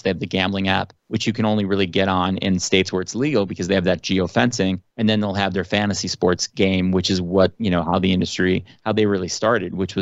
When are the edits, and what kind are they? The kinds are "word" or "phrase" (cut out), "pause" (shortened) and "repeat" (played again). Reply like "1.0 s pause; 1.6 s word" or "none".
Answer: 1.0 s pause; 4.9 s pause

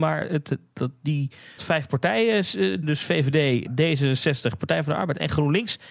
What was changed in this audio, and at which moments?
1.6 s word; 2.8 s word; 3.7 s word

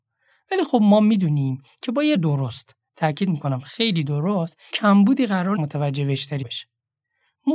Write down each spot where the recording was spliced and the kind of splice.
2.1 s word; 4.7 s word; 5.6 s word; 6.4 s word

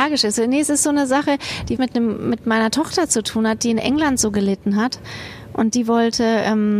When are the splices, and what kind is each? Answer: 1.8 s word

